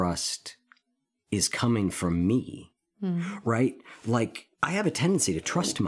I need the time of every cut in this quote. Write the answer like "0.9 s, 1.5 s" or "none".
4.5 s